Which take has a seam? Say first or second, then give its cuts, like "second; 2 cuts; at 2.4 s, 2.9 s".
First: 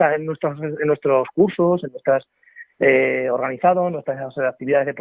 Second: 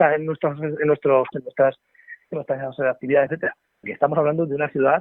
second; 4 cuts; at 1.3 s, 2.3 s, 3.3 s, 3.8 s